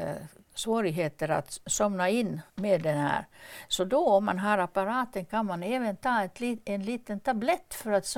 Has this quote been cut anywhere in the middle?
yes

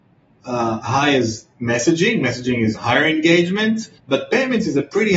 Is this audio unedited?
no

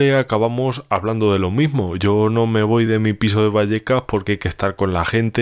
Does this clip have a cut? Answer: no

